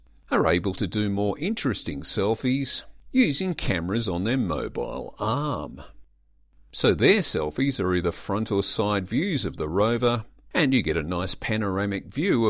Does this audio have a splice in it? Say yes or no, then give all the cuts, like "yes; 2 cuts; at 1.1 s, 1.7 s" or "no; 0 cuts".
no; 0 cuts